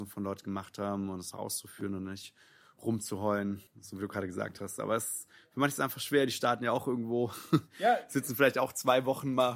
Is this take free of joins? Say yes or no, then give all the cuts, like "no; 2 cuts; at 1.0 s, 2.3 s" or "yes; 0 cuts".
no; 2 cuts; at 1.3 s, 3.7 s